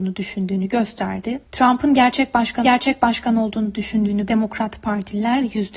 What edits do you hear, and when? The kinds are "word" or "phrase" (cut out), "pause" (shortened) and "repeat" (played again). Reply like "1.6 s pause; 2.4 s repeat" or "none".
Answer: 1.4 s pause; 2.6 s repeat; 4.3 s word